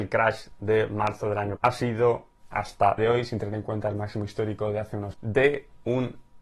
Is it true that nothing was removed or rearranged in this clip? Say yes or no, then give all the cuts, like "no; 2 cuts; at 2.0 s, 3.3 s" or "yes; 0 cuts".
no; 3 cuts; at 1.6 s, 3.0 s, 5.1 s